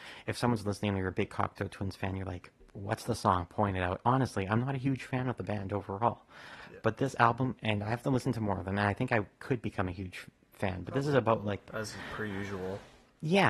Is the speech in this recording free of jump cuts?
yes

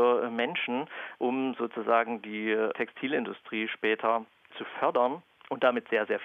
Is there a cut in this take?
no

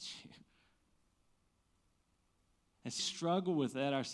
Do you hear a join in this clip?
yes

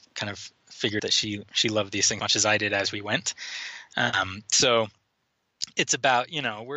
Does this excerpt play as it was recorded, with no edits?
no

